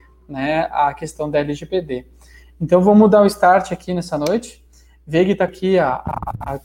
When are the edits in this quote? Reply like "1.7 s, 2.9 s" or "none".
5.5 s